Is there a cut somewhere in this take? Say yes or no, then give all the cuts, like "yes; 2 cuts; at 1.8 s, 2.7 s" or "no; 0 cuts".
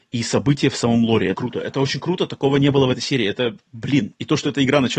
yes; 1 cut; at 1.3 s